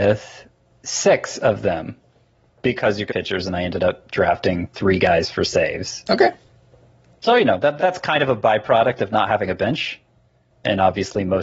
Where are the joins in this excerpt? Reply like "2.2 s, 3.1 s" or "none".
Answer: 3.1 s, 7.8 s